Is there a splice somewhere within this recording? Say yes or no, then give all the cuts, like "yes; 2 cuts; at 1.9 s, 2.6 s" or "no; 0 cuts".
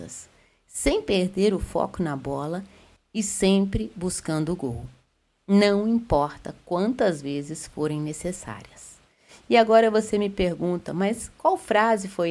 no; 0 cuts